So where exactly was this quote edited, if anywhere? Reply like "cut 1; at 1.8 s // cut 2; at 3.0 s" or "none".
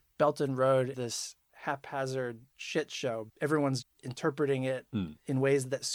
cut 1; at 0.9 s // cut 2; at 2.5 s // cut 3; at 3.3 s // cut 4; at 3.8 s